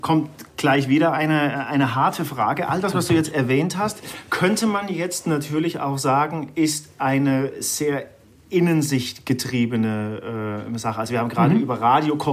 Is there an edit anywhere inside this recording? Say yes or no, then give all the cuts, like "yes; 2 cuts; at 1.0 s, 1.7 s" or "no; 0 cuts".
no; 0 cuts